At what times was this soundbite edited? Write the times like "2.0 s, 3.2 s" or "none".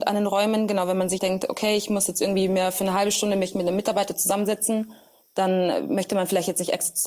1.2 s